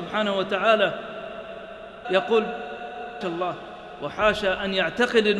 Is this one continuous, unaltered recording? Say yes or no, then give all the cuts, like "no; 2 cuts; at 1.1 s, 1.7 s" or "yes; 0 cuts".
no; 2 cuts; at 2.0 s, 3.2 s